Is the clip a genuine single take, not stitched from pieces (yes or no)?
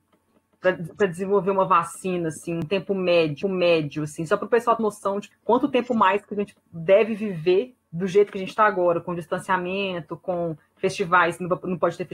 no